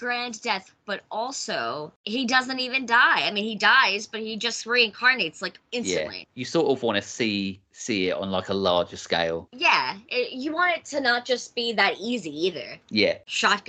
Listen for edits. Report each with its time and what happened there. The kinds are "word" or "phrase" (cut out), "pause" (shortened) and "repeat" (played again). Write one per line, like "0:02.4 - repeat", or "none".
none